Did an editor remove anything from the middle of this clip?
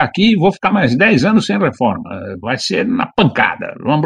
no; 0 cuts

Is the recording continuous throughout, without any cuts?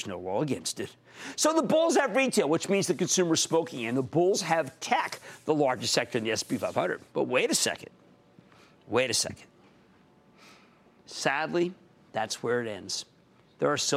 yes; 0 cuts

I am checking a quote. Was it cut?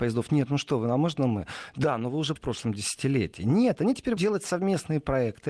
yes; 2 cuts; at 2.4 s, 4.2 s

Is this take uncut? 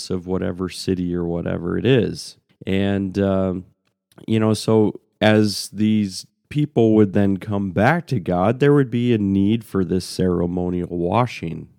yes; 0 cuts

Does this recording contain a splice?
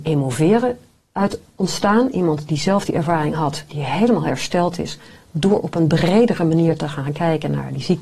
no; 0 cuts

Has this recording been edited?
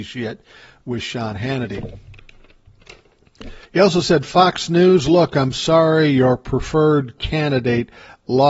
yes; 1 cut; at 3.7 s

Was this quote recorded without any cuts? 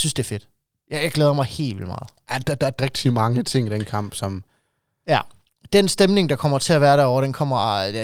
no; 1 cut; at 2.8 s

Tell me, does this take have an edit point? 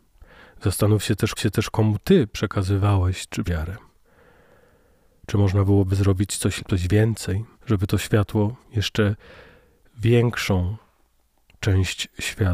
yes; 5 cuts; at 1.4 s, 3.4 s, 6.6 s, 7.5 s, 8.6 s

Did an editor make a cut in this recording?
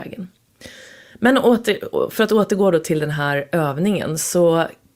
no; 0 cuts

